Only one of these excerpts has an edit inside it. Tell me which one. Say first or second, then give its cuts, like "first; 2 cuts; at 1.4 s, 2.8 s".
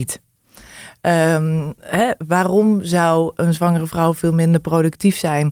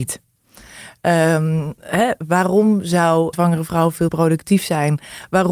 second; 2 cuts; at 3.3 s, 4.1 s